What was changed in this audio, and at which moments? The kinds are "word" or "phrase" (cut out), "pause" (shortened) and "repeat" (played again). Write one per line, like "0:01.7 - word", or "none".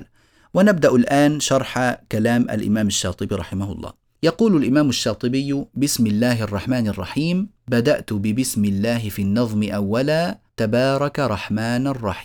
0:04.1 - pause
0:07.6 - pause
0:10.5 - pause